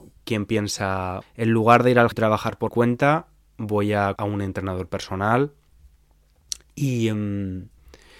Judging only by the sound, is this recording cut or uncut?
cut